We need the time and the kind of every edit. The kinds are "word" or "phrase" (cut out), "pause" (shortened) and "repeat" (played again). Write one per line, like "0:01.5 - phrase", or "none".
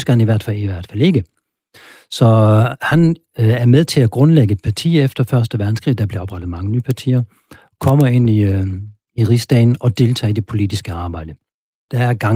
none